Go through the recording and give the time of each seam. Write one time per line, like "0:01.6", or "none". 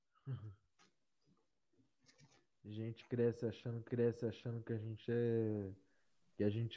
0:03.9